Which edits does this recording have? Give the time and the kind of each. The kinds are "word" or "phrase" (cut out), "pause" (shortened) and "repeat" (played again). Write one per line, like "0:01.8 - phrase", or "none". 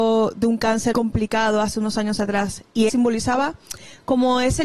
0:00.9 - word
0:02.9 - word